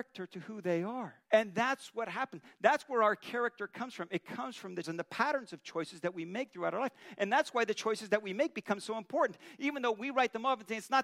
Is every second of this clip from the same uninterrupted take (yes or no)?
no